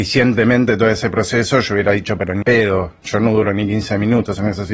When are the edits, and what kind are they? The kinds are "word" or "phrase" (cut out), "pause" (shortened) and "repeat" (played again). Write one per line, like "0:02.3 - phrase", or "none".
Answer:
0:02.4 - word